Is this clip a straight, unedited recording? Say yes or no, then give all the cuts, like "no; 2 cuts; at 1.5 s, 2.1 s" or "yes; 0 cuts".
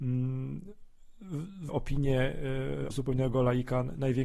no; 2 cuts; at 1.7 s, 2.9 s